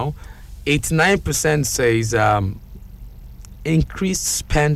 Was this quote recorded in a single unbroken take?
yes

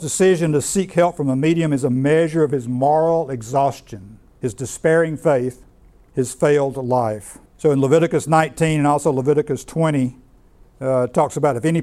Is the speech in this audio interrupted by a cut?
yes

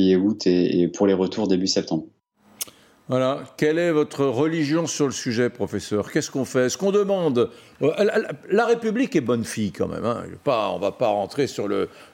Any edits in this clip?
no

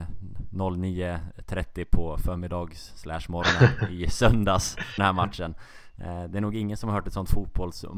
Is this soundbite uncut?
no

